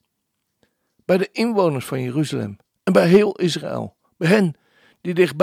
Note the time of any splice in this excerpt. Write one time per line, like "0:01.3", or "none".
none